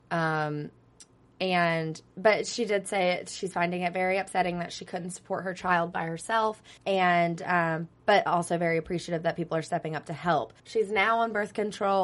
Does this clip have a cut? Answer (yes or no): yes